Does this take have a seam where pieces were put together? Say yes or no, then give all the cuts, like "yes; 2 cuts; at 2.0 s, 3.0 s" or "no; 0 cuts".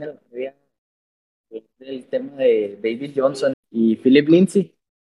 yes; 1 cut; at 3.5 s